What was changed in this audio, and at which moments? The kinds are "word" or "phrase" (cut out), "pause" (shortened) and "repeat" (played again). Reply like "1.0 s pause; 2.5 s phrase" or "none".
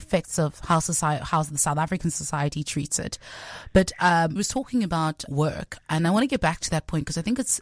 4.4 s word; 5.3 s word

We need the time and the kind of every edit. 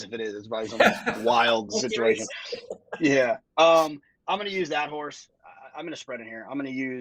none

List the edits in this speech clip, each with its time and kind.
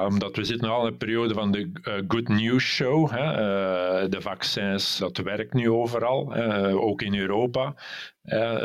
5.0 s word

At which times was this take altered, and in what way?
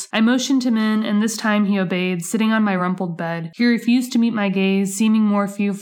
none

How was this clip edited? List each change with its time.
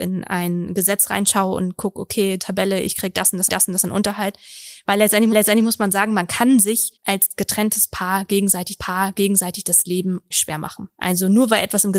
2.4 s word; 3.5 s repeat; 5.3 s repeat; 7.0 s pause; 8.8 s repeat; 10.3 s word; 10.9 s pause

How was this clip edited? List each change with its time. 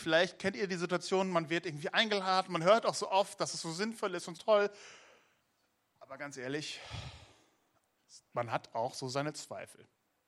4.3 s word

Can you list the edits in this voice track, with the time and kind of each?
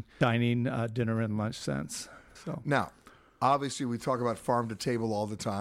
none

